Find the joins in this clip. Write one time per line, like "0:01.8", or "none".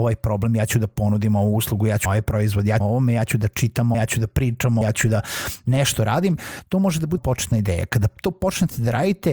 0:02.0
0:02.8
0:03.9
0:04.8
0:07.2

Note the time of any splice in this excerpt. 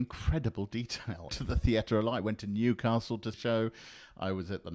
0:01.3
0:03.3

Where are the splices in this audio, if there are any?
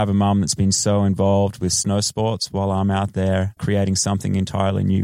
0:03.6

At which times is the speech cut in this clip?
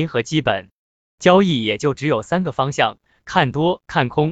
none

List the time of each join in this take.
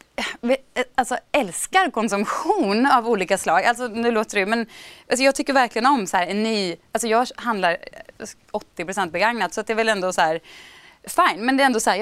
none

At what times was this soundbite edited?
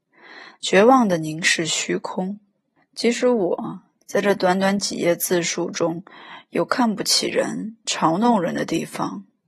0:02.8

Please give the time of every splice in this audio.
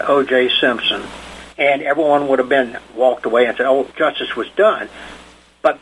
0:01.5
0:03.9

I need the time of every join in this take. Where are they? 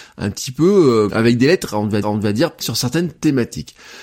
0:01.1
0:02.0
0:02.6

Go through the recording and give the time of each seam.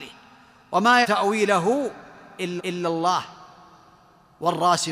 0:01.0
0:02.6

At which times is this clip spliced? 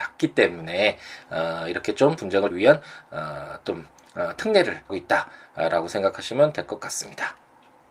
0:02.2
0:02.5
0:04.9

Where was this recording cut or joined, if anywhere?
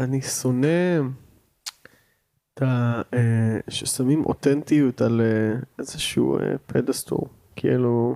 none

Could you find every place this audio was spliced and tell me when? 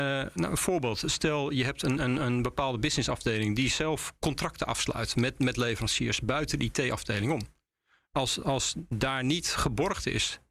none

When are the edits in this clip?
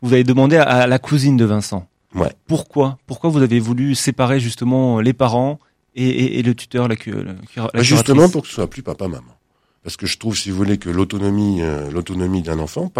none

